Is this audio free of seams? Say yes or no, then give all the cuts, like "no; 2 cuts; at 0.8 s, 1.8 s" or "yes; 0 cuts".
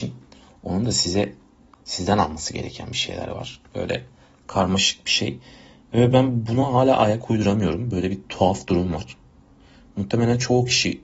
yes; 0 cuts